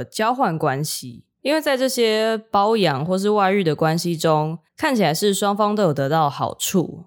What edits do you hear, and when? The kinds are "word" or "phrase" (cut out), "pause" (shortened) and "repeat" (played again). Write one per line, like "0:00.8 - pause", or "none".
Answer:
0:04.7 - pause